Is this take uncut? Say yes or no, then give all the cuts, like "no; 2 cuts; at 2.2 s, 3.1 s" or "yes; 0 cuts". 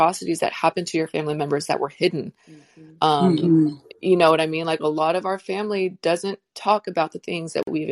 yes; 0 cuts